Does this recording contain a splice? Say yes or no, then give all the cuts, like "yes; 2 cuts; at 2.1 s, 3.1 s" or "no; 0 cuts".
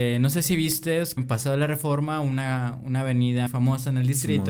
yes; 2 cuts; at 1.2 s, 3.5 s